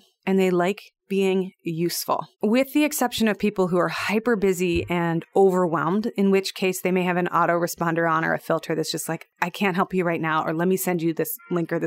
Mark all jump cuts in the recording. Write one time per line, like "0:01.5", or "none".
0:02.3